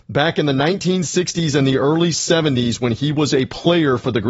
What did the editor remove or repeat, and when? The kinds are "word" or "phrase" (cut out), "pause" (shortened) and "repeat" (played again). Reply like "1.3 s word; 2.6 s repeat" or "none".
none